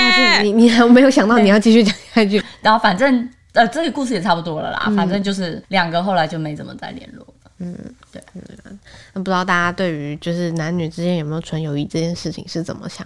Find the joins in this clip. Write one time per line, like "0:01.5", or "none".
0:02.4
0:05.6
0:08.0